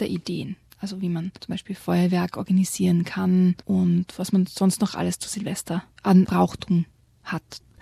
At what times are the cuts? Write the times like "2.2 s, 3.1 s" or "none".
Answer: 1.4 s, 3.6 s, 5.9 s